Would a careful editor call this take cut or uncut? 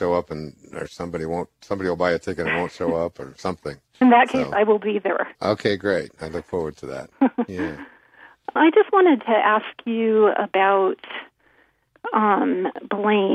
cut